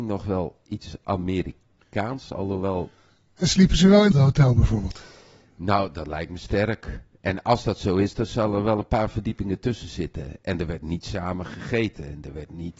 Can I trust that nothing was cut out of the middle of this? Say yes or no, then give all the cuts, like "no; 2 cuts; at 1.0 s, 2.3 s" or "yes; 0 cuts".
no; 1 cut; at 4.1 s